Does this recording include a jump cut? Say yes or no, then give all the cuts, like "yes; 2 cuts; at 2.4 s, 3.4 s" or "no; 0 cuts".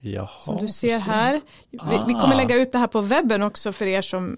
no; 0 cuts